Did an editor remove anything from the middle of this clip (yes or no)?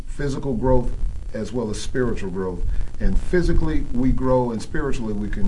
no